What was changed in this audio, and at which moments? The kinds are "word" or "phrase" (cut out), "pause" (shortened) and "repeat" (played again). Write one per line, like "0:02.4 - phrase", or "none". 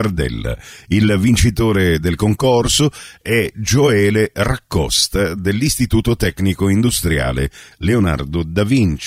none